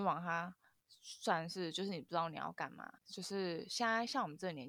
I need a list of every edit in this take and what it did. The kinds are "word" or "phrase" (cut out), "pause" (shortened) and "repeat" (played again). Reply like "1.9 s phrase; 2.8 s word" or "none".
3.0 s pause

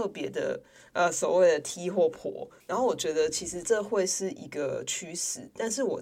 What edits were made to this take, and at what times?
2.6 s pause

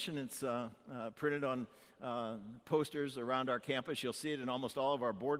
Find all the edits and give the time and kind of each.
none

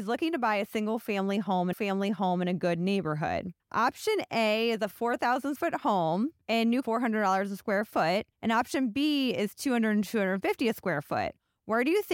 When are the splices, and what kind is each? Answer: 1.7 s repeat; 3.6 s pause; 5.6 s word; 6.4 s pause; 6.8 s phrase; 8.3 s pause

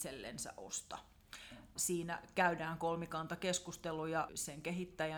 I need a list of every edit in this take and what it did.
1.8 s word; 4.3 s word

